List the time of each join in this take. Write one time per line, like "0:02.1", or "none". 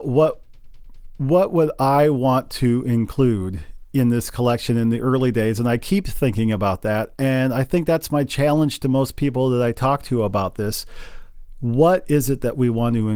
none